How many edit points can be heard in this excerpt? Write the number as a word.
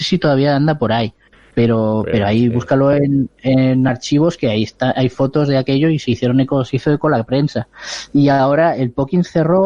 zero